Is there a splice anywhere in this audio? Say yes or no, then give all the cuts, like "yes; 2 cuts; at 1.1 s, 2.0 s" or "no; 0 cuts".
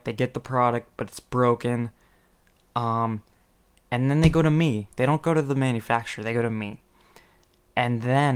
no; 0 cuts